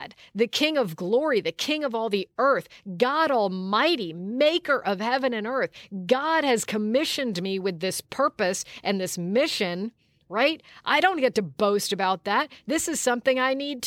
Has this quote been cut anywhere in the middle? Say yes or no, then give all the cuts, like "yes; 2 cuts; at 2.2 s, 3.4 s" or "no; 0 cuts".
no; 0 cuts